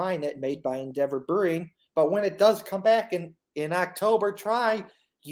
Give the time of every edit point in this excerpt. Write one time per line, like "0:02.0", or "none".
none